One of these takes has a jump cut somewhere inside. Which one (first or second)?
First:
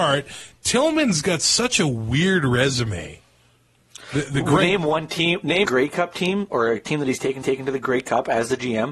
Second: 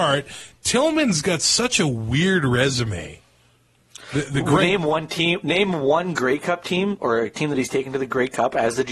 first